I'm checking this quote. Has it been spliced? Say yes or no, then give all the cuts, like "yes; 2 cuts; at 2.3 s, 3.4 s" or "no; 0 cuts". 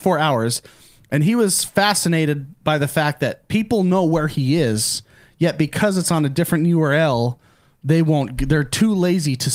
no; 0 cuts